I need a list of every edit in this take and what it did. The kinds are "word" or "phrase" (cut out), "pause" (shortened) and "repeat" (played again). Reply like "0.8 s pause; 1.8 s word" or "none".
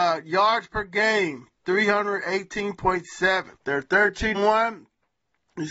3.6 s pause; 4.3 s word